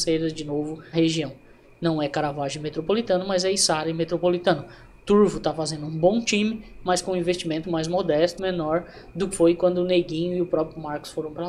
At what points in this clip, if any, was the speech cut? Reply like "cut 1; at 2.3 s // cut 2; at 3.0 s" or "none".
cut 1; at 0.9 s // cut 2; at 7.6 s // cut 3; at 8.4 s // cut 4; at 9.3 s